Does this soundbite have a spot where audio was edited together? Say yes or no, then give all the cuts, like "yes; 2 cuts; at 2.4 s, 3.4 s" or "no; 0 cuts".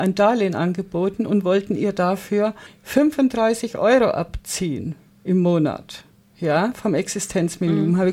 no; 0 cuts